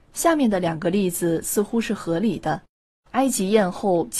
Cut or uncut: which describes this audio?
cut